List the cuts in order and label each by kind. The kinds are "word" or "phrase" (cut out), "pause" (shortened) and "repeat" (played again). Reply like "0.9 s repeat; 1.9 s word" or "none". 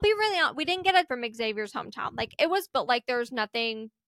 1.1 s word; 2.7 s word

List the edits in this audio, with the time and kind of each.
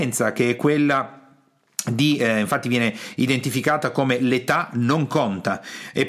none

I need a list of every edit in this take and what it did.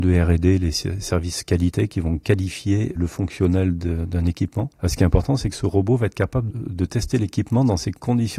3.0 s word; 6.5 s word

